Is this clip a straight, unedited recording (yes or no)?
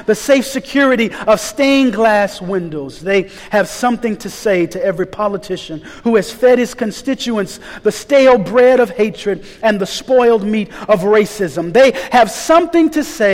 yes